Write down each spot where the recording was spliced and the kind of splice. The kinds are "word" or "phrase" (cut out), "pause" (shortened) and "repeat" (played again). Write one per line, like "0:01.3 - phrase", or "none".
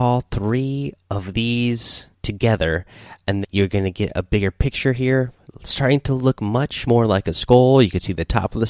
0:02.1 - pause
0:03.4 - word
0:05.4 - pause
0:06.8 - word